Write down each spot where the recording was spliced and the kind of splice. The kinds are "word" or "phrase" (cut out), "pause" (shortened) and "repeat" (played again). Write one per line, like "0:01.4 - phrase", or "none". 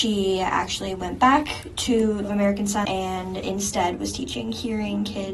0:02.2 - word
0:02.8 - word